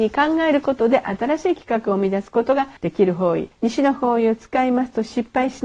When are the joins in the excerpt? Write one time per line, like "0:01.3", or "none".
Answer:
0:02.8
0:03.5